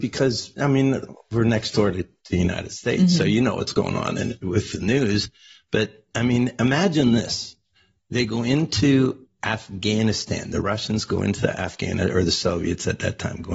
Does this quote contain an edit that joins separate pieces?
no; 0 cuts

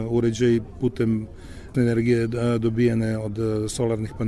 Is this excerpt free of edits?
no; 1 cut; at 1.7 s

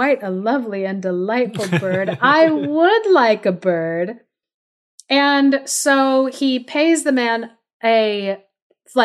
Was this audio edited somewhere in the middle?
no; 0 cuts

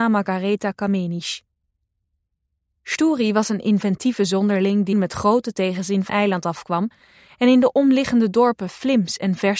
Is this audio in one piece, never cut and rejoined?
no; 2 cuts; at 4.9 s, 6.1 s

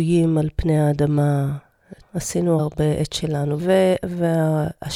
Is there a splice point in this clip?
yes; 3 cuts; at 2.0 s, 2.6 s, 3.6 s

